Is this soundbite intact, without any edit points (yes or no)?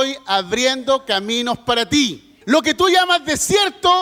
no